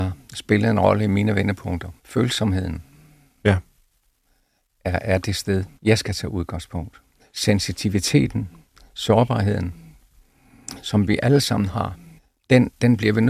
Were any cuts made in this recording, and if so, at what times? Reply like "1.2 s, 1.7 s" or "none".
2.0 s, 5.8 s